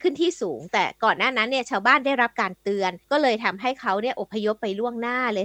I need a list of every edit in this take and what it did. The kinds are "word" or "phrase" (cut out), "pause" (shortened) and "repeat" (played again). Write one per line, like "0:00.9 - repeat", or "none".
0:03.0 - pause